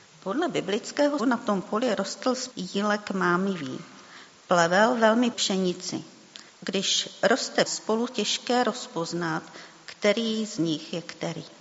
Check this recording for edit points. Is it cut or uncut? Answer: cut